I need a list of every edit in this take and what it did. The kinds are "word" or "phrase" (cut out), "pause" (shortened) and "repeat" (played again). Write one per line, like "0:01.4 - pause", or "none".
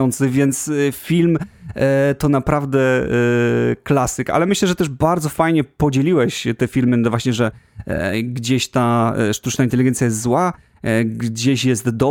none